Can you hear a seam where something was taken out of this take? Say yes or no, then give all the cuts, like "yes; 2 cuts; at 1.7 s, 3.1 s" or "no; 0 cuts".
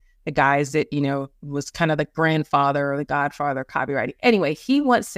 no; 0 cuts